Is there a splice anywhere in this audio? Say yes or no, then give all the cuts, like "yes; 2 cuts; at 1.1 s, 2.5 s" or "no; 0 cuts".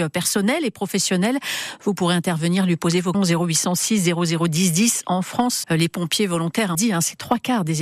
yes; 3 cuts; at 3.1 s, 5.6 s, 6.7 s